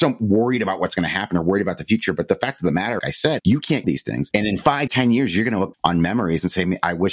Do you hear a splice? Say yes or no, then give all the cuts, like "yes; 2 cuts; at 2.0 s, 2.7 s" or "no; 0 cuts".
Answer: yes; 6 cuts; at 3.0 s, 3.4 s, 3.8 s, 4.3 s, 4.9 s, 5.7 s